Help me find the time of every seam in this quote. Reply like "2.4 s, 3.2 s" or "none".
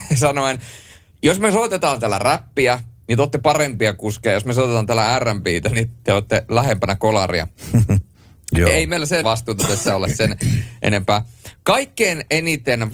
9.2 s